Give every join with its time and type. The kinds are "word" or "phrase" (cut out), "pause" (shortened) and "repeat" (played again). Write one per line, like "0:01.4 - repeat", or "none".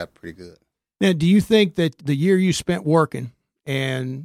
0:02.0 - word